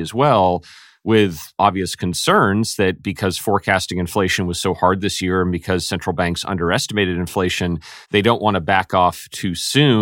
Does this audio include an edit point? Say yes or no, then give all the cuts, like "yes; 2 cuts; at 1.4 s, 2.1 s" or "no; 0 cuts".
yes; 1 cut; at 8.0 s